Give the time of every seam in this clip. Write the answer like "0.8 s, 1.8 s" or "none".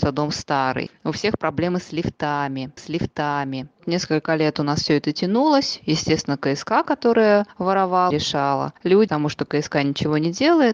2.8 s, 8.1 s, 9.1 s